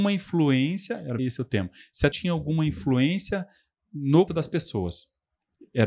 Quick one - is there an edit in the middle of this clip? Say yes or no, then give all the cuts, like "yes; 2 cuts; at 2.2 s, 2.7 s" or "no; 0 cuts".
yes; 3 cuts; at 1.2 s, 2.1 s, 4.3 s